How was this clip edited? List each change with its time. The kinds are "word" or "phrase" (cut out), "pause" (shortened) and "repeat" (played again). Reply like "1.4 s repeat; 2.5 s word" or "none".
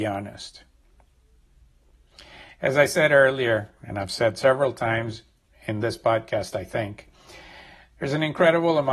none